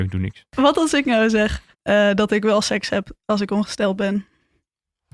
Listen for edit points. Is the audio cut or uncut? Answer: cut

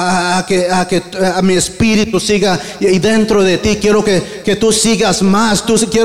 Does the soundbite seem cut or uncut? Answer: uncut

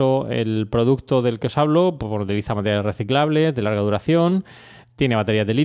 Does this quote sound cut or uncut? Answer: uncut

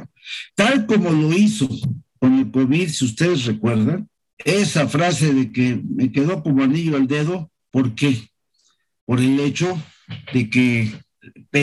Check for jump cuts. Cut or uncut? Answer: uncut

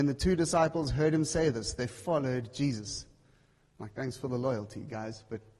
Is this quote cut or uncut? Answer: uncut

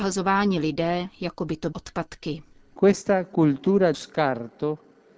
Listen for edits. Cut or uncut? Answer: cut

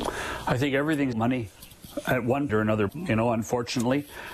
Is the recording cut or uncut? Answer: cut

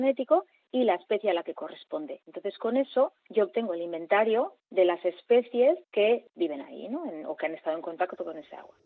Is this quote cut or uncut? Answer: cut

